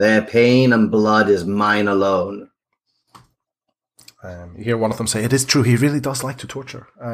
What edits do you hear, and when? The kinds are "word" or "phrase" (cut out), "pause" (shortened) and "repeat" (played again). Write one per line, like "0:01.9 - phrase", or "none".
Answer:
none